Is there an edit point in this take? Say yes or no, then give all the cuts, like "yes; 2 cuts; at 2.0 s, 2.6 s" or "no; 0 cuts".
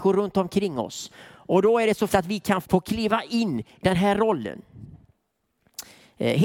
yes; 3 cuts; at 2.1 s, 2.6 s, 3.8 s